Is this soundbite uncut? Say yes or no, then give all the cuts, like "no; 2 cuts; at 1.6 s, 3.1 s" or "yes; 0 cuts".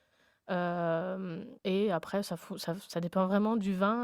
no; 1 cut; at 1.6 s